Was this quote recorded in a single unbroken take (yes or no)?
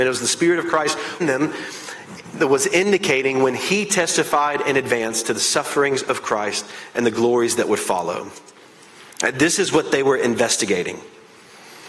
no